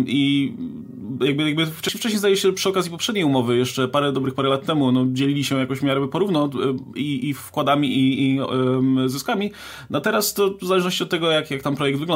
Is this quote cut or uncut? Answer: uncut